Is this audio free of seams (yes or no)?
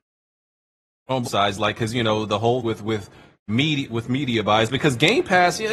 no